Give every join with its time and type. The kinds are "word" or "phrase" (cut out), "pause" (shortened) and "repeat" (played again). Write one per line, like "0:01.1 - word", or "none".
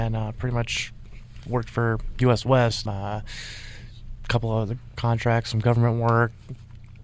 0:02.9 - word
0:04.9 - word